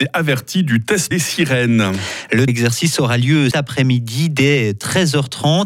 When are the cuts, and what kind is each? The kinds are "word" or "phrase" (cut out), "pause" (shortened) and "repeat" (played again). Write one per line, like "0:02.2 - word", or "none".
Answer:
0:01.1 - word
0:02.5 - word
0:03.5 - word